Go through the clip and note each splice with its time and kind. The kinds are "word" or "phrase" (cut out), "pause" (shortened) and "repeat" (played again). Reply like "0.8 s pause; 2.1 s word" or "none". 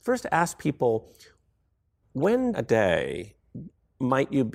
2.0 s word; 2.5 s word